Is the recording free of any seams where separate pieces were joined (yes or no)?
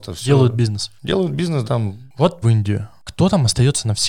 no